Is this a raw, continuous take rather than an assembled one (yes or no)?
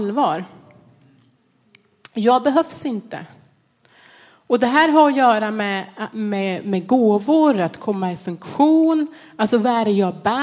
yes